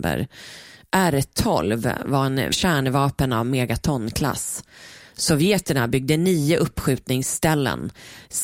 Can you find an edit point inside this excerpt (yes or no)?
yes